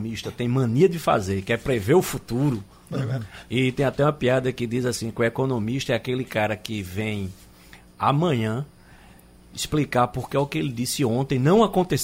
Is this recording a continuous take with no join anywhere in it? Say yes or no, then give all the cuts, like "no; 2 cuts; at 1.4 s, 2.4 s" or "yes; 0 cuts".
yes; 0 cuts